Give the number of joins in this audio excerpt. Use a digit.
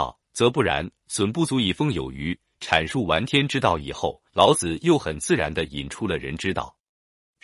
1